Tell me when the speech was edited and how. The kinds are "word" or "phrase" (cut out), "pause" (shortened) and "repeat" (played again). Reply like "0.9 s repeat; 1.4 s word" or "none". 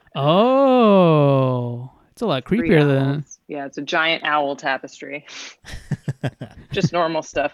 3.4 s pause